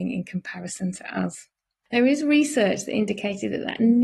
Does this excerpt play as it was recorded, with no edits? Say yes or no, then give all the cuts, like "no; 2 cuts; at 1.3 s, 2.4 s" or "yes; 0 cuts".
yes; 0 cuts